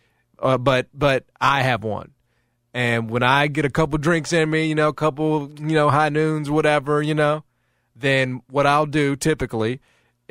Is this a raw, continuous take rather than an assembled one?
yes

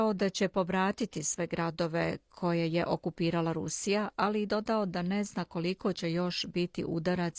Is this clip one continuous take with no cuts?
yes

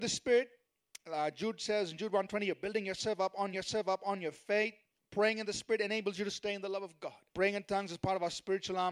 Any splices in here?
yes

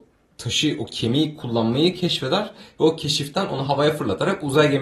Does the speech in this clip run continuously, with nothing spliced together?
yes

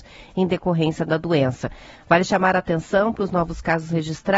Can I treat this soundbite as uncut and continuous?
yes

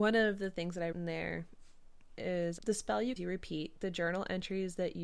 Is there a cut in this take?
yes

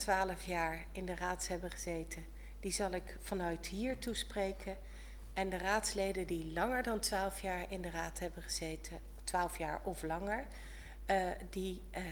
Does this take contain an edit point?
no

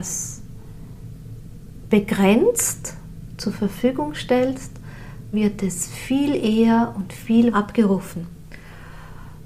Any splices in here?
yes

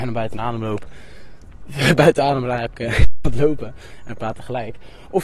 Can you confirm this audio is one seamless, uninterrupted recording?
no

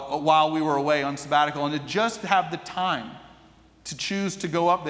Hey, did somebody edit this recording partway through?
no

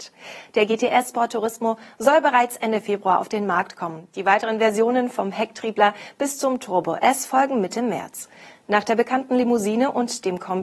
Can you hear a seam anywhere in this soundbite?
no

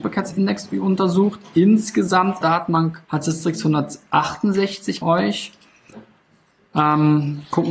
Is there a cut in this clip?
yes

